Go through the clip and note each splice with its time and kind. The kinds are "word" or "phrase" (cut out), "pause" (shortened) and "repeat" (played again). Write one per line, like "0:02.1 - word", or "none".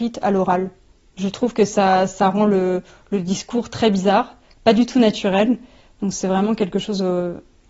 none